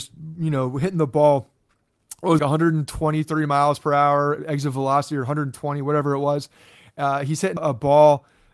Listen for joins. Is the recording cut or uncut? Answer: cut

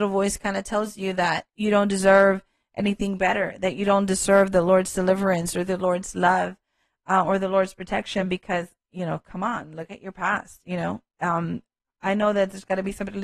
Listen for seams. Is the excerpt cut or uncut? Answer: uncut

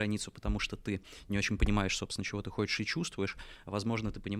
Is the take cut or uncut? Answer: uncut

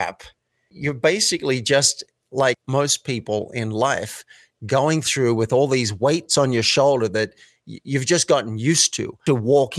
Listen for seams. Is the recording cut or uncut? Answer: uncut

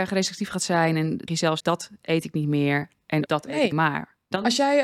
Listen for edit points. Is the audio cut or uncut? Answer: cut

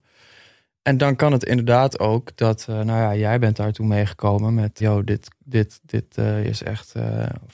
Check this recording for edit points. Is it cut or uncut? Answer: cut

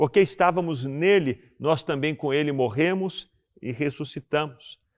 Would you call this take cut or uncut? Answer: uncut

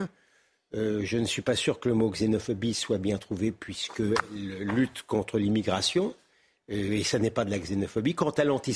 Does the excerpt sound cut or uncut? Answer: uncut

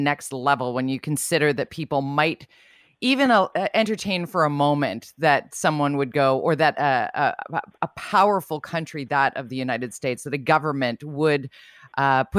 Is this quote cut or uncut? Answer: uncut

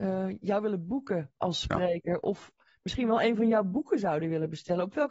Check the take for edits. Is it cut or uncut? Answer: uncut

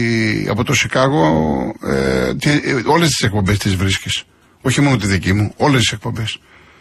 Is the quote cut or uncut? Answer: uncut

